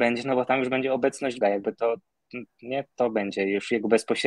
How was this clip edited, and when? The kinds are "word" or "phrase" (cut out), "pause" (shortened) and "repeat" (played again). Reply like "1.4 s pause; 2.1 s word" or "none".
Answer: 1.4 s word